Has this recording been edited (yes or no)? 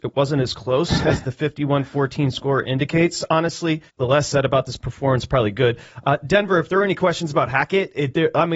yes